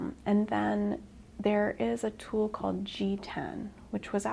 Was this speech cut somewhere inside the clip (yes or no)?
no